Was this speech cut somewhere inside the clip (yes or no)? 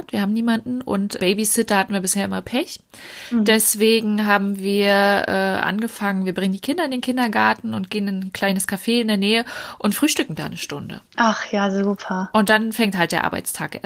yes